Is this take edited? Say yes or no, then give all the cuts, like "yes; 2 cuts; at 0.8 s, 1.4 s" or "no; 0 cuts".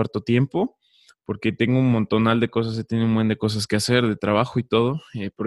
no; 0 cuts